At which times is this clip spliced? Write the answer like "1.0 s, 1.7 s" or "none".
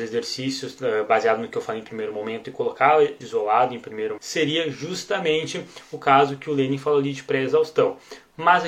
3.2 s, 4.2 s

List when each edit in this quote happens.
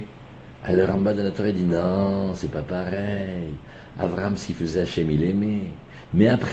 none

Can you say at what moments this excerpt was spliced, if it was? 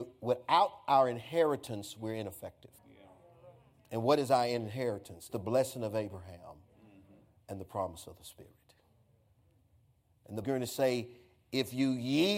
2.8 s, 5.3 s, 10.4 s

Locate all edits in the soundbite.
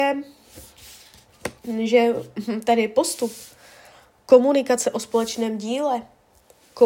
1.6 s

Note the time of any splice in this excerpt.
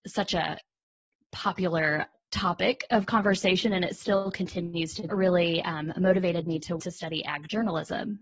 5.1 s, 6.8 s

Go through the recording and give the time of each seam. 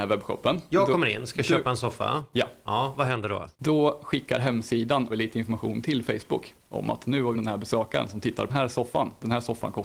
3.5 s, 5.1 s, 7.3 s, 8.5 s

